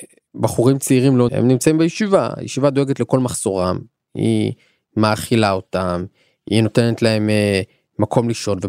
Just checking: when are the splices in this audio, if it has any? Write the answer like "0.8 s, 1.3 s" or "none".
1.3 s